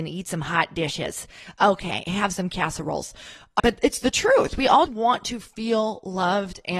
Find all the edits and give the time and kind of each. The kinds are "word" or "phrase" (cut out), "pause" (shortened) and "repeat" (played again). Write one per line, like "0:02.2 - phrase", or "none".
0:03.6 - word
0:04.9 - word